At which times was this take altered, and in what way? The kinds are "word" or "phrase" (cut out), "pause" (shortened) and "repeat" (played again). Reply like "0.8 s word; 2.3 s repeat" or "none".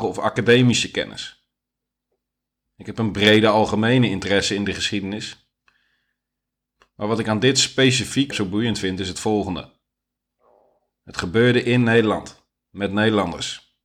8.3 s word